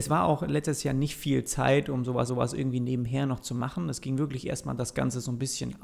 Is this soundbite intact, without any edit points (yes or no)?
no